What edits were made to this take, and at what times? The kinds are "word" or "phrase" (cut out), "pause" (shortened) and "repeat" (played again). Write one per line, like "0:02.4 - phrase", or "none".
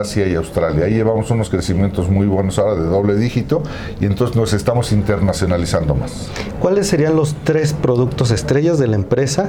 none